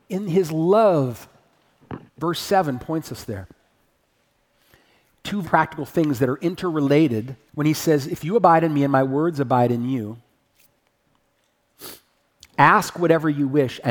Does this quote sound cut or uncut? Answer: cut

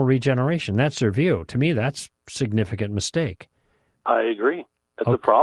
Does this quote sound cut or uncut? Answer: uncut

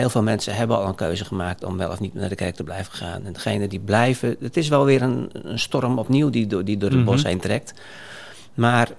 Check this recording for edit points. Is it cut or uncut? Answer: uncut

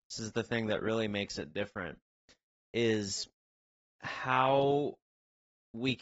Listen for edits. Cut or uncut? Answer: uncut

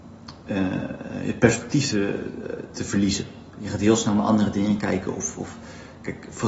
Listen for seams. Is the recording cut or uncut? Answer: uncut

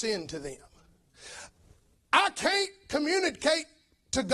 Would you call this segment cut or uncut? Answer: uncut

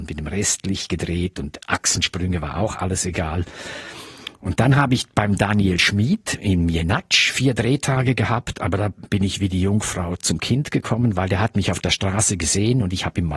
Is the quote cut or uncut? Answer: uncut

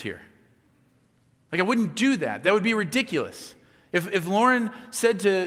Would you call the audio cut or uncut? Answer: uncut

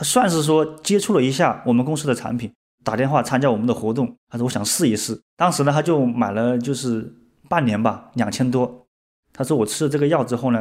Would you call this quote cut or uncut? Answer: uncut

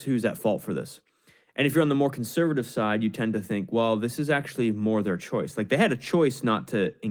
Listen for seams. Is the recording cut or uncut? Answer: uncut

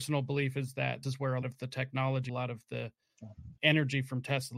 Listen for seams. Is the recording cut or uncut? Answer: cut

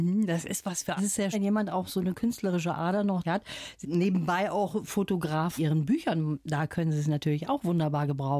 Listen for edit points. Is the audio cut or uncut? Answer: cut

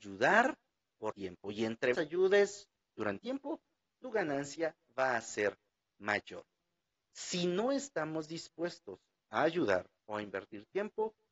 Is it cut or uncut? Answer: cut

